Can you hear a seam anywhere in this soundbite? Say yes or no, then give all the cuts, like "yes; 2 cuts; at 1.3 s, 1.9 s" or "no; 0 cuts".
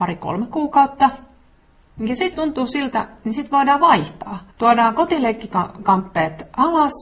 yes; 2 cuts; at 2.3 s, 4.5 s